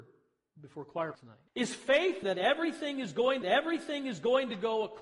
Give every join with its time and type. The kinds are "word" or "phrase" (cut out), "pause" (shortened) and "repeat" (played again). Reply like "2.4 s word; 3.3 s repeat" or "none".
1.1 s word; 1.5 s pause; 2.2 s word; 3.4 s repeat